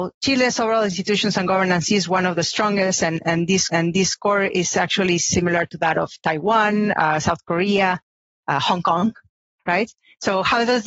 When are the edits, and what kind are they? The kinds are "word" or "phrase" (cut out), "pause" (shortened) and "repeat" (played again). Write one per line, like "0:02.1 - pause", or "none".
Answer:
0:03.7 - repeat